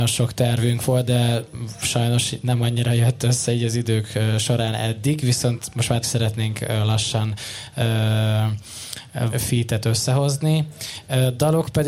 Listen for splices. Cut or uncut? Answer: cut